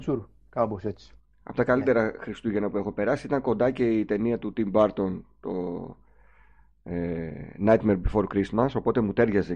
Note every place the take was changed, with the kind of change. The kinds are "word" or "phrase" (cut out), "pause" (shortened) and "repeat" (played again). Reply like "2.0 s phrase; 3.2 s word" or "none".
1.2 s pause